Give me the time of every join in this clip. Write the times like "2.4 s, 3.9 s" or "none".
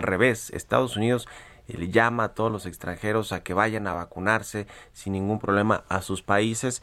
none